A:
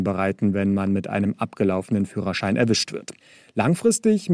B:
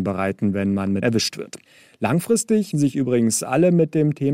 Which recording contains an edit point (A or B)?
B